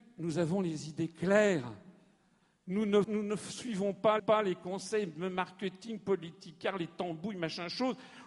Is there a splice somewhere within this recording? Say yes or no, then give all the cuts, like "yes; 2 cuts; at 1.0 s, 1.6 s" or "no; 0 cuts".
yes; 2 cuts; at 3.0 s, 4.2 s